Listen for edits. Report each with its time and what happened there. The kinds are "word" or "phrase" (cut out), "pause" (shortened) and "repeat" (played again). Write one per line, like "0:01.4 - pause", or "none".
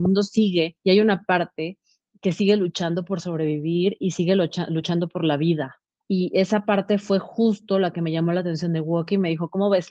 none